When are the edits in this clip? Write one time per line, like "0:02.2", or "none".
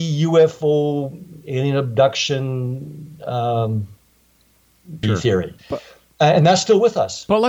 0:05.0
0:05.6